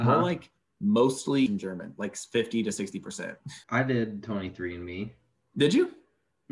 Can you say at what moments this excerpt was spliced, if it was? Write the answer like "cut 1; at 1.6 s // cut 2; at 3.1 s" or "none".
cut 1; at 1.5 s // cut 2; at 3.6 s